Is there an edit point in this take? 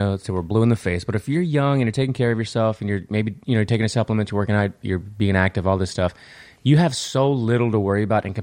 no; 0 cuts

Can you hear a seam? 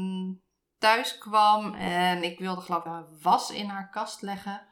yes; 1 cut; at 2.9 s

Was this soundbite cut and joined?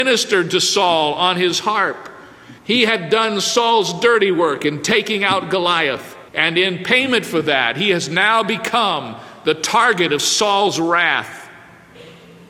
yes; 2 cuts; at 2.6 s, 6.3 s

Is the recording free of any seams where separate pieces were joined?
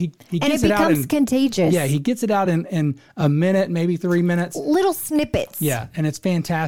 yes; 0 cuts

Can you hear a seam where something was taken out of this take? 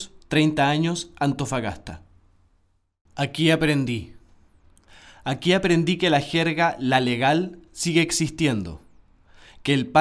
no; 0 cuts

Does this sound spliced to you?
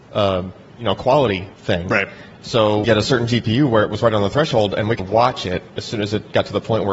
yes; 3 cuts; at 1.5 s, 2.8 s, 5.0 s

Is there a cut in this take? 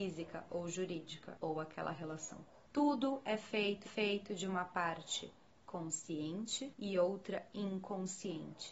yes; 1 cut; at 3.8 s

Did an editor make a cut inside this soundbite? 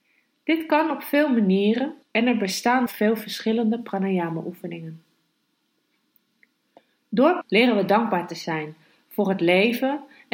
yes; 3 cuts; at 2.0 s, 2.9 s, 7.4 s

